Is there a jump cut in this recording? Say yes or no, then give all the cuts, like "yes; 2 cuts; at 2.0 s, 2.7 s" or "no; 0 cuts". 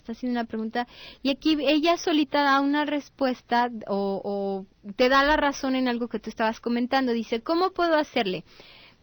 no; 0 cuts